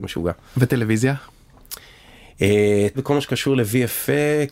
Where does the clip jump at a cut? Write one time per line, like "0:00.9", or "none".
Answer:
0:02.9